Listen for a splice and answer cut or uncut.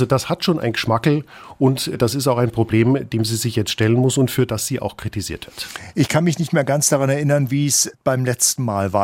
uncut